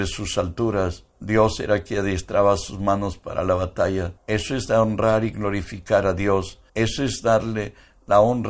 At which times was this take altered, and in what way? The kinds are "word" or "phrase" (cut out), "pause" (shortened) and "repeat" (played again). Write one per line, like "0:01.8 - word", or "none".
0:01.1 - pause
0:04.2 - pause
0:06.7 - pause